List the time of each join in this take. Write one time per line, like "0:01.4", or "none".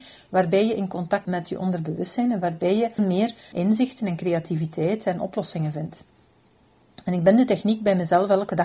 0:01.2
0:03.0
0:03.5